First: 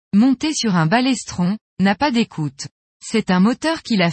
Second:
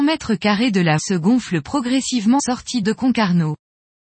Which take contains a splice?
second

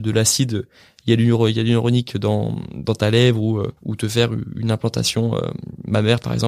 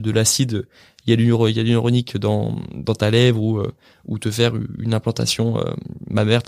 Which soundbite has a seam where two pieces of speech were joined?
first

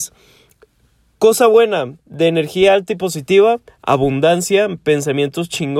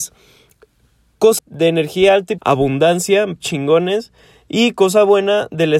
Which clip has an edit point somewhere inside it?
second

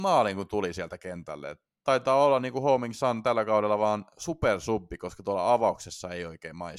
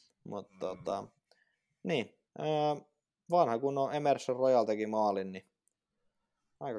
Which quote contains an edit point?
second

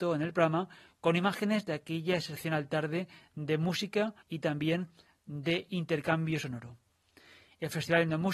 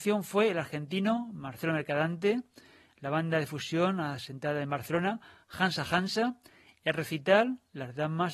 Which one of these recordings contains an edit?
first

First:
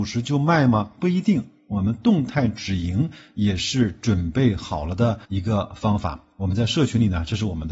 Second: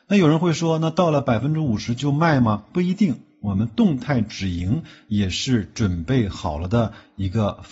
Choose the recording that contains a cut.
first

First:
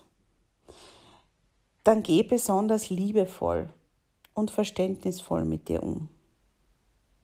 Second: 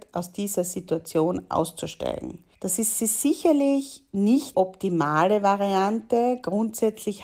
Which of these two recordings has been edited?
second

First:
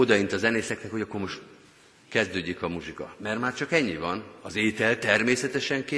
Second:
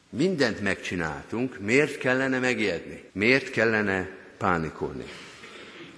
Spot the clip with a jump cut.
second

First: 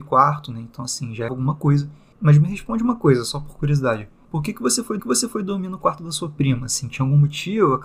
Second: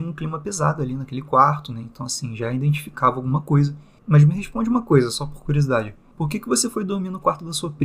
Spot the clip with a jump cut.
first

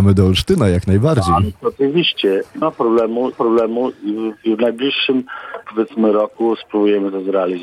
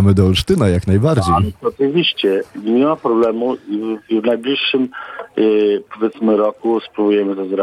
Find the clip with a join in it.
first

